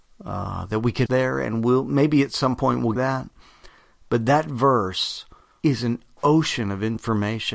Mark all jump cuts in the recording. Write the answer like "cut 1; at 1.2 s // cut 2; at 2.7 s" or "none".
cut 1; at 1.1 s // cut 2; at 3.0 s // cut 3; at 5.6 s